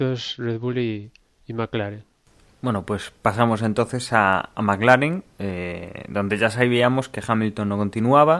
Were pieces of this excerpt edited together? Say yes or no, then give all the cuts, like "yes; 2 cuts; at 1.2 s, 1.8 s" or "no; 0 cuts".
no; 0 cuts